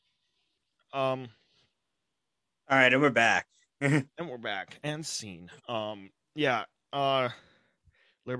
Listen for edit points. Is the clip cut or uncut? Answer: cut